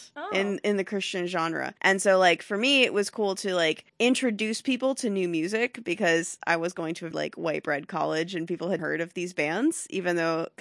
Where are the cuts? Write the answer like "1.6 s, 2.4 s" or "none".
1.8 s, 3.9 s, 7.1 s, 8.8 s